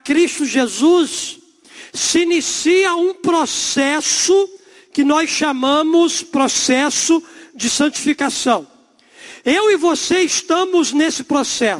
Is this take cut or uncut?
uncut